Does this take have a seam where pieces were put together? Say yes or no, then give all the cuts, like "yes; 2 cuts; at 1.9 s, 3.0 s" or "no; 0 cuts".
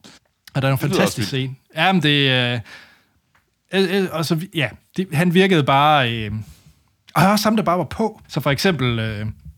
yes; 1 cut; at 8.2 s